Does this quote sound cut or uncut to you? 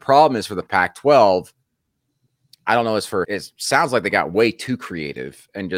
cut